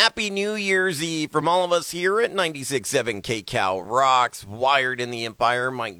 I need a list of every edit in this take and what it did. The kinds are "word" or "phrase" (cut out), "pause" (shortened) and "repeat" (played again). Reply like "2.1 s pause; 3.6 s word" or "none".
none

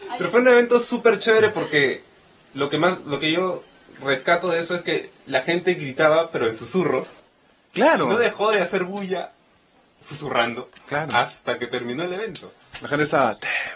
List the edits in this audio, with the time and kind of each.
none

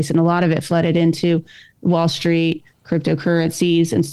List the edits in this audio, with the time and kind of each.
none

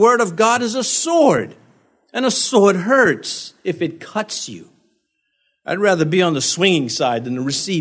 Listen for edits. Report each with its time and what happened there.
none

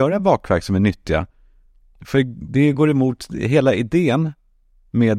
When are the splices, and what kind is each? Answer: none

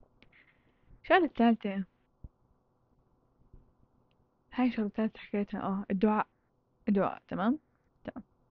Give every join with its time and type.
none

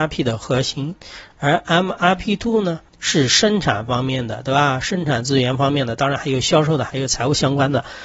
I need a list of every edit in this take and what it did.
2.9 s pause

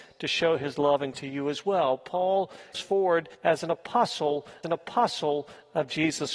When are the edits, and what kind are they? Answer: 1.1 s word; 2.7 s word; 3.3 s pause; 4.6 s repeat

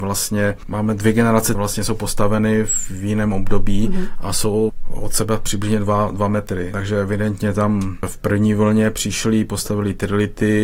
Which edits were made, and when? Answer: 1.5 s phrase

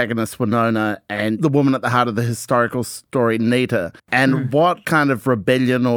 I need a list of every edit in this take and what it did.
4.0 s pause

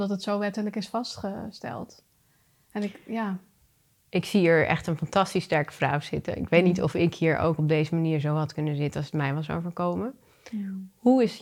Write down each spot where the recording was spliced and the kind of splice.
none

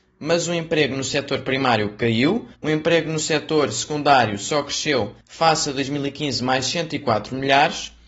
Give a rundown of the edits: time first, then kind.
2.5 s pause; 5.2 s pause

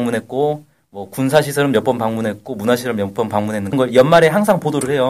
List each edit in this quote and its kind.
3.7 s word

